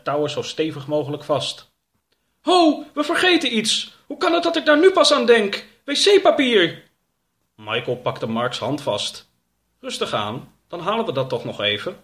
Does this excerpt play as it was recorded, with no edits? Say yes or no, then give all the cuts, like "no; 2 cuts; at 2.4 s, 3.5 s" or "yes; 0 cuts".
yes; 0 cuts